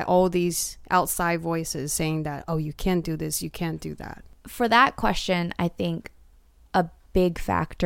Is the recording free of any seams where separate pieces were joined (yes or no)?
yes